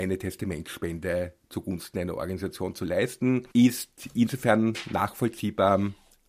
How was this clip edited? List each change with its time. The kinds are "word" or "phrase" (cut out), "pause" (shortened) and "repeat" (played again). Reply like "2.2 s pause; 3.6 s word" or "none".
3.5 s pause